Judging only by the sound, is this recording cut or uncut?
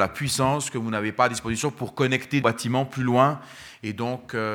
cut